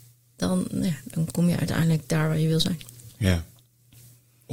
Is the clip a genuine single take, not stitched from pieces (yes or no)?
yes